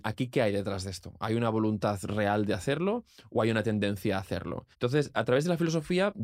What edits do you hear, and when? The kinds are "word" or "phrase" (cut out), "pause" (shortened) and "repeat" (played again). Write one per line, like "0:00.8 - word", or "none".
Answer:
0:04.7 - pause